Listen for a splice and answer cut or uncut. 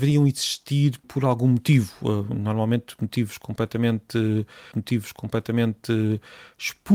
cut